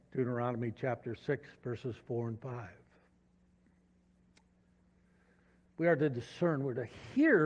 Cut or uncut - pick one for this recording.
uncut